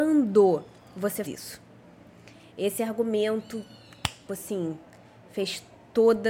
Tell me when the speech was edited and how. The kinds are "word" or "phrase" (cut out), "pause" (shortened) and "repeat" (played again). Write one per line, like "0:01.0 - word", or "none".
0:01.2 - word
0:04.3 - phrase